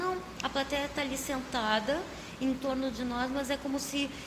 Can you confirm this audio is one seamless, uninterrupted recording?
yes; 0 cuts

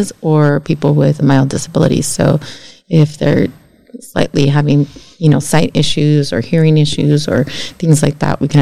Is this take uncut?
no; 1 cut; at 1.2 s

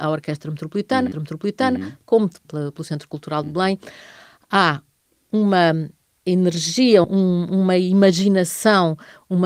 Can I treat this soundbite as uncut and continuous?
no; 3 cuts; at 1.1 s, 2.4 s, 7.0 s

